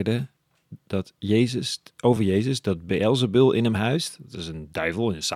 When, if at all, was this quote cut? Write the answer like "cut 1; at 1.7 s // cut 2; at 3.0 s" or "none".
none